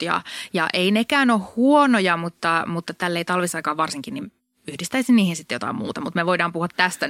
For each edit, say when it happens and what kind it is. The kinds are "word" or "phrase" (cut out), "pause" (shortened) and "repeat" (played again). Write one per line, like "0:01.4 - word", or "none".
none